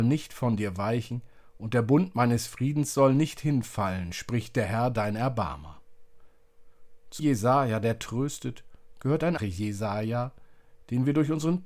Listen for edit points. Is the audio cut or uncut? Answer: cut